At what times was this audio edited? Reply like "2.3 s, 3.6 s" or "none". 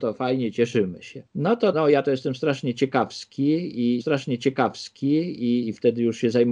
1.3 s, 1.7 s, 4.0 s